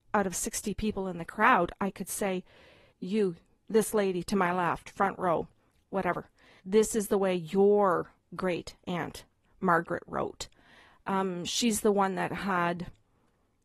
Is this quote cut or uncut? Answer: cut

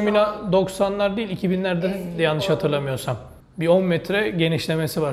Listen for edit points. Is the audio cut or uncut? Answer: cut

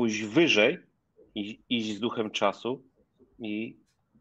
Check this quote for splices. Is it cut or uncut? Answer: uncut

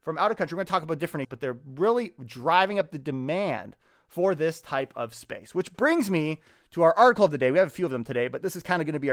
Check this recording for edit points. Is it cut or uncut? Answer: cut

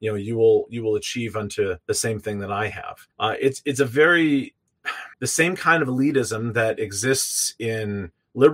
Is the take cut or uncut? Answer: cut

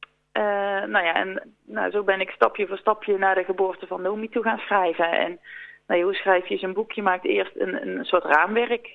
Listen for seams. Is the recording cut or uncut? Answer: cut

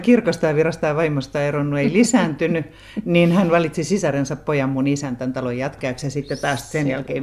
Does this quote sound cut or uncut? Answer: uncut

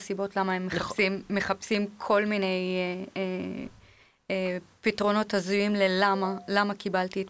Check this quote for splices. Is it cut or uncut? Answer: uncut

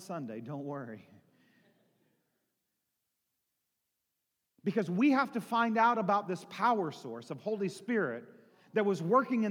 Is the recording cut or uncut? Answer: uncut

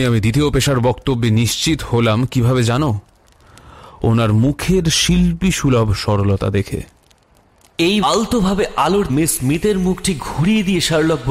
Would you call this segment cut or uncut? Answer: cut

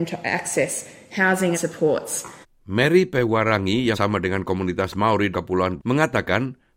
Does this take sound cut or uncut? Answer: cut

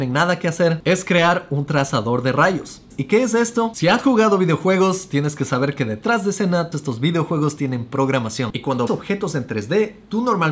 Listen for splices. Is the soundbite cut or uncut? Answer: cut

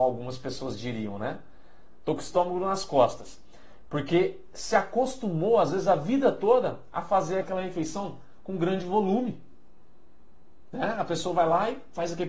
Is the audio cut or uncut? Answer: cut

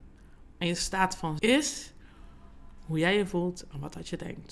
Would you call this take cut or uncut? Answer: cut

